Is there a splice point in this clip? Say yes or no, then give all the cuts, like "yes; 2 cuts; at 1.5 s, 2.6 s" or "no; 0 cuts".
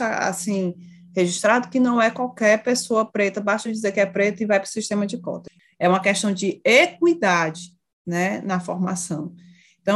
no; 0 cuts